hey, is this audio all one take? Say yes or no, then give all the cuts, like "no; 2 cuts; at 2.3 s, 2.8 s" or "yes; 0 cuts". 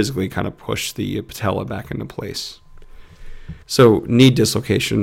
no; 1 cut; at 3.6 s